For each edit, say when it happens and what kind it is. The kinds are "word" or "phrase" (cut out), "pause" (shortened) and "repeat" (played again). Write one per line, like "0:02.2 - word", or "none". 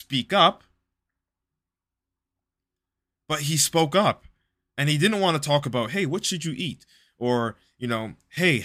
none